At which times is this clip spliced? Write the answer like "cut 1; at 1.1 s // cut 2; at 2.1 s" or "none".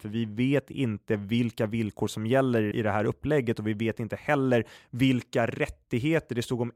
cut 1; at 2.7 s // cut 2; at 4.8 s